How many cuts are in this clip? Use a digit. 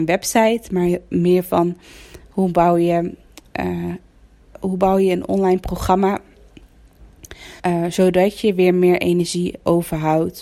1